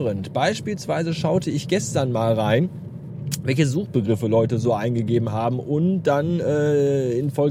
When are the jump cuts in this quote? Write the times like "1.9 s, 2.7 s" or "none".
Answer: none

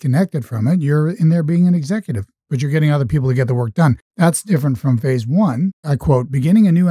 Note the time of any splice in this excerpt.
4.0 s

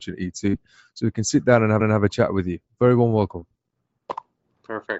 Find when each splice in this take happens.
1.8 s

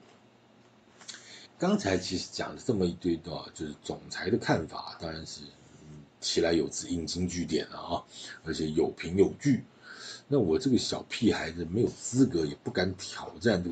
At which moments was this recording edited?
1.5 s

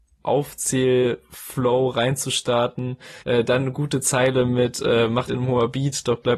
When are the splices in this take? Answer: 3.2 s, 5.3 s

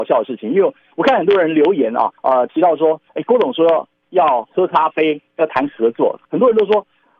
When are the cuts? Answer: 2.2 s, 3.1 s, 6.2 s

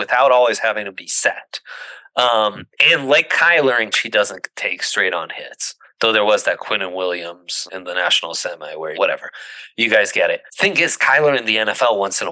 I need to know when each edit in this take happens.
3.9 s, 5.8 s, 7.7 s, 8.9 s, 10.5 s

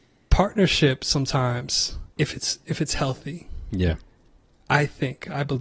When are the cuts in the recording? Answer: 2.1 s

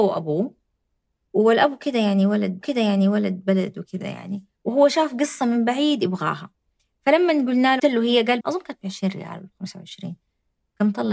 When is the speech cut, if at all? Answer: 2.6 s, 4.6 s, 7.8 s, 8.4 s

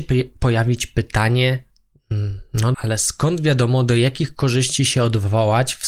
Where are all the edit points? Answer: 2.7 s

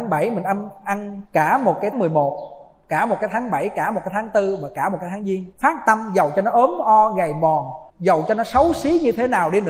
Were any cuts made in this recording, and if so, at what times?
1.3 s, 1.9 s, 5.5 s, 7.9 s

